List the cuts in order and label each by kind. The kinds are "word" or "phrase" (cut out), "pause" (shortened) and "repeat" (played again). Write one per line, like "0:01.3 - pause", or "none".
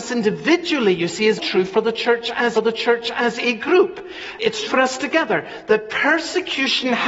0:01.4 - word
0:02.5 - repeat
0:04.6 - word